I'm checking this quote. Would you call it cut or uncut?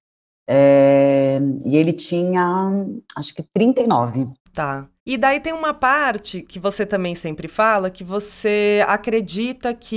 uncut